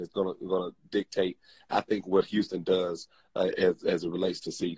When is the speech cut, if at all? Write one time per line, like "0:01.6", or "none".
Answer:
none